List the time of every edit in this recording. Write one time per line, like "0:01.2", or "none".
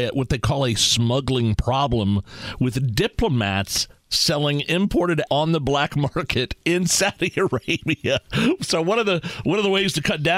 0:05.3